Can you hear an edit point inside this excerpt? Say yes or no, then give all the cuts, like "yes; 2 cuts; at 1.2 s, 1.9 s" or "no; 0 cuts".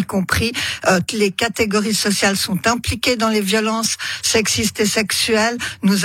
yes; 1 cut; at 1.1 s